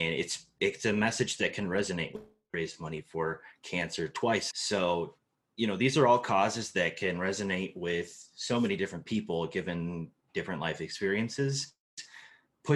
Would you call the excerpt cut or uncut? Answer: cut